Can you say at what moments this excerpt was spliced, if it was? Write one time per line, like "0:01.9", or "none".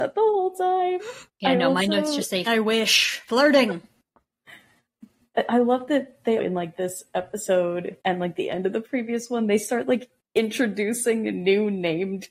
0:01.3
0:02.5
0:06.4
0:08.0